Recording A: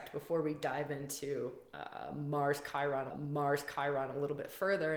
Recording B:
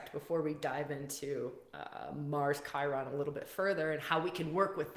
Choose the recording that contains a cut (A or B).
A